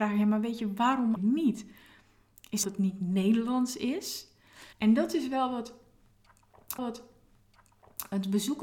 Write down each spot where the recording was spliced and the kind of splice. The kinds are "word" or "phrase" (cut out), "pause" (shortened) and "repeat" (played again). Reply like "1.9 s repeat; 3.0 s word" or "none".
1.2 s word; 2.6 s phrase; 4.7 s pause; 6.8 s repeat